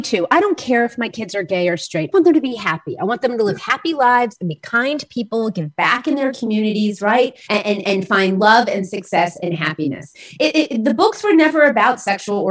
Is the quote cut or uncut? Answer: cut